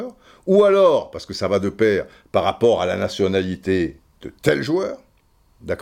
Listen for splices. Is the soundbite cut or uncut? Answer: uncut